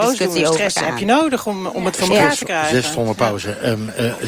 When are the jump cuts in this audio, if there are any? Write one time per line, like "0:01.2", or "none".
none